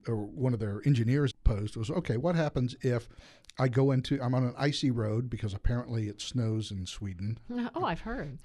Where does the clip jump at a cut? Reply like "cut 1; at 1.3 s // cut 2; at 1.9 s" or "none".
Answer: cut 1; at 1.3 s